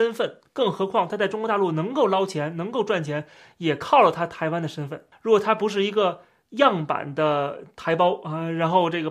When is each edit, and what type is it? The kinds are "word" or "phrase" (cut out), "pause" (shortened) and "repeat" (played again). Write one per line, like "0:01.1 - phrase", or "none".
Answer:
none